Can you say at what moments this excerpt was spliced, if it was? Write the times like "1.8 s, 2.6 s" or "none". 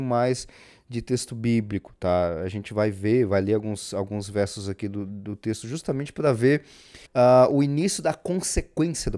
7.0 s